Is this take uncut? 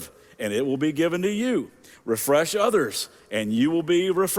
yes; 0 cuts

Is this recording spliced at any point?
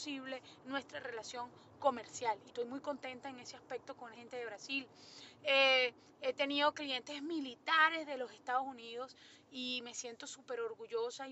yes; 2 cuts; at 2.5 s, 4.1 s

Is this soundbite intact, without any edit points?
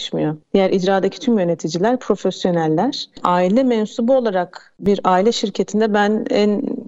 yes; 0 cuts

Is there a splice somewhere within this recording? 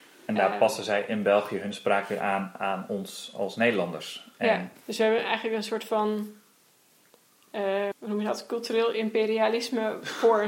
yes; 2 cuts; at 4.8 s, 7.9 s

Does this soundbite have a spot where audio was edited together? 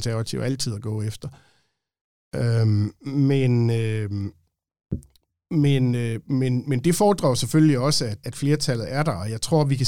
yes; 1 cut; at 8.2 s

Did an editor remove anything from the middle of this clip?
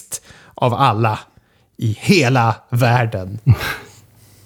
no; 0 cuts

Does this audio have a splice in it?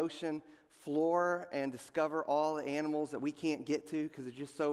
no; 0 cuts

